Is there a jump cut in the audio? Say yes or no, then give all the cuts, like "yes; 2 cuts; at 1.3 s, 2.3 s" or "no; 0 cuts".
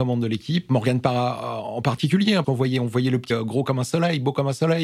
yes; 2 cuts; at 2.4 s, 3.3 s